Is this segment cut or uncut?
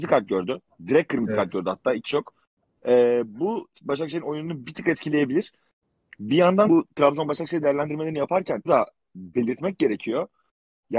cut